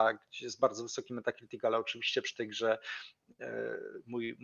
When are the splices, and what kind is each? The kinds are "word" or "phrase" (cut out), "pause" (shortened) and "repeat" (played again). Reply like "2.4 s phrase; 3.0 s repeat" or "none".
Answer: none